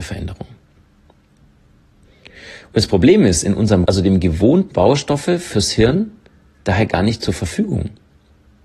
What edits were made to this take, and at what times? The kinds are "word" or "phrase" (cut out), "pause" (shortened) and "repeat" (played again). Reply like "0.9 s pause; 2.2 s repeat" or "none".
3.9 s word; 4.7 s phrase